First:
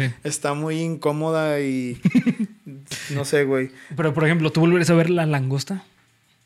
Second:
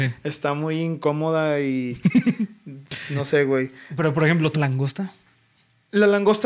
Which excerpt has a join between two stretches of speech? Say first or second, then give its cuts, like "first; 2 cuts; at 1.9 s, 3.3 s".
second; 1 cut; at 4.5 s